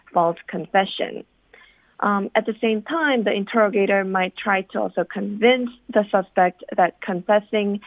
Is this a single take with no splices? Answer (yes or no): yes